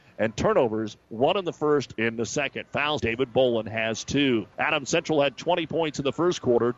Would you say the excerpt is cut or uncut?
cut